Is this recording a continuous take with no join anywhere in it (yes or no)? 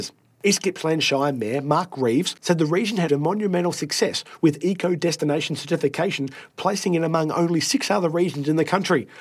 no